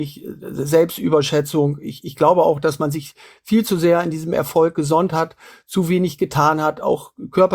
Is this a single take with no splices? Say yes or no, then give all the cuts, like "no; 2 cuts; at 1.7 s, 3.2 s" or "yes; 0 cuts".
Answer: yes; 0 cuts